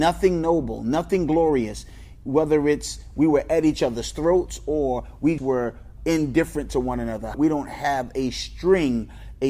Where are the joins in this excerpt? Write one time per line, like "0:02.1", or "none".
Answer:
0:05.4
0:06.0
0:07.3